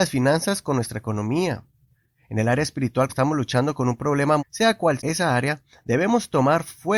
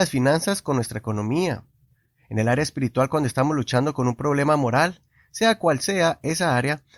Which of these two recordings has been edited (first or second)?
first